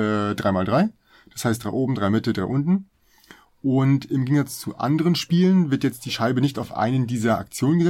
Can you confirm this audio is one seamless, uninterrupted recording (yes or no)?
yes